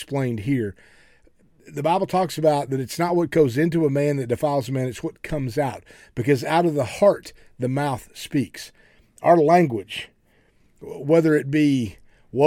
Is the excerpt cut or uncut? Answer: uncut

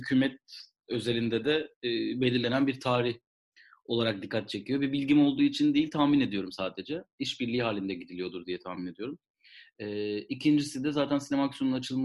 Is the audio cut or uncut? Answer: uncut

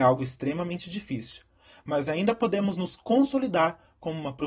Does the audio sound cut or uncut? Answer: uncut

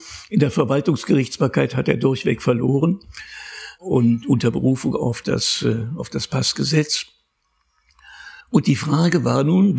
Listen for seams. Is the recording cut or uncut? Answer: cut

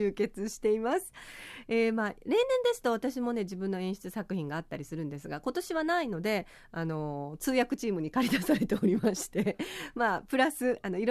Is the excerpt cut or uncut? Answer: uncut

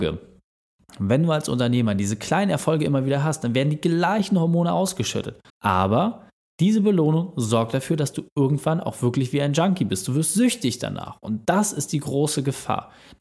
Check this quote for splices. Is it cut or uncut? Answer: cut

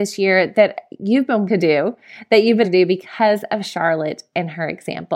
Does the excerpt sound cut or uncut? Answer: cut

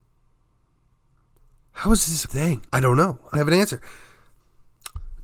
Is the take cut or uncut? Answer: cut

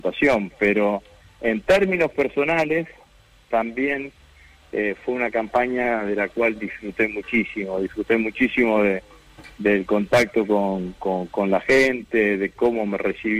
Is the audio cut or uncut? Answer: uncut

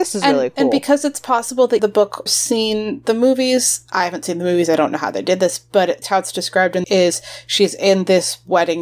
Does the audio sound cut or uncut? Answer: cut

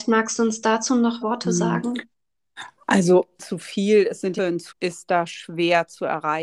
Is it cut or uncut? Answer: cut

